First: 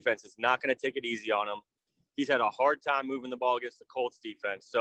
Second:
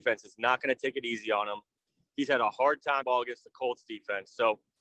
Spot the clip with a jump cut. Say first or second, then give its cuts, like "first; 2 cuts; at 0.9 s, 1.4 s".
second; 1 cut; at 3.0 s